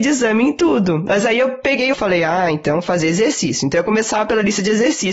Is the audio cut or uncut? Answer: cut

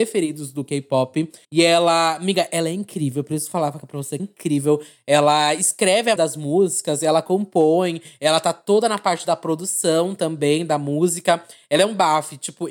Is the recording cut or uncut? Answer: cut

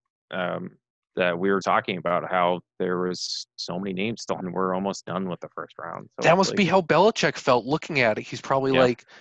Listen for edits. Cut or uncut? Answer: cut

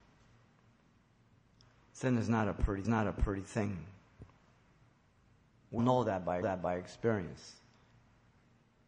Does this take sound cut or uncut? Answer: cut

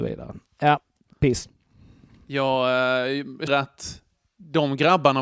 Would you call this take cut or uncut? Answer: cut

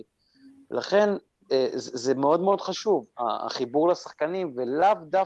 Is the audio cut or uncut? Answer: uncut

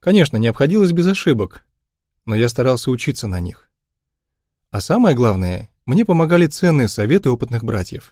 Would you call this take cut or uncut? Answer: uncut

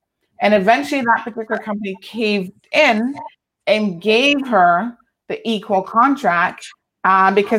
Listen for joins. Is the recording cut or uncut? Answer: uncut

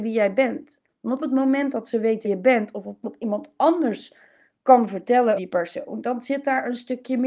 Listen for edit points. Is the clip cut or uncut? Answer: cut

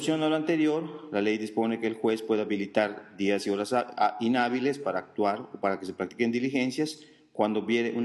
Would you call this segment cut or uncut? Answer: uncut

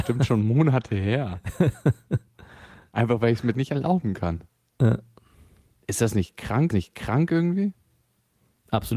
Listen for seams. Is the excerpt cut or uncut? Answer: cut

